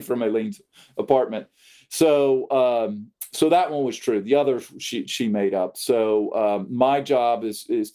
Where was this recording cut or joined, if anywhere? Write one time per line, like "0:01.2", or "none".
0:05.1